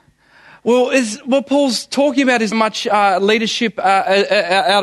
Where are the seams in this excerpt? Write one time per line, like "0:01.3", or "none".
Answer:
0:02.5